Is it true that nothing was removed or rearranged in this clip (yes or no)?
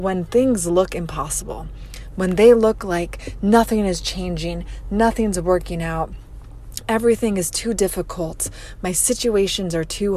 yes